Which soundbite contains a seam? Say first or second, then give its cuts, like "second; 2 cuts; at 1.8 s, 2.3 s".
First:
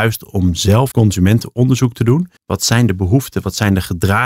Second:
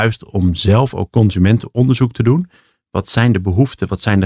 first; 2 cuts; at 0.9 s, 2.4 s